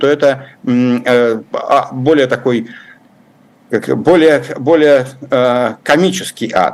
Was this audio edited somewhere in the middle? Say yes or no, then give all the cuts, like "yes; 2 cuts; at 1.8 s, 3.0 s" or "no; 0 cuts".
no; 0 cuts